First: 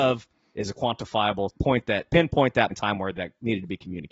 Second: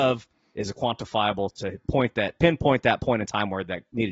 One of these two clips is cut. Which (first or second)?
first